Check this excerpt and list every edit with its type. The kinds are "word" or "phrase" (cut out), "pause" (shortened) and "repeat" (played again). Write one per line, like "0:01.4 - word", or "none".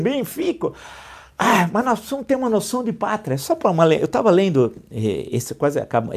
none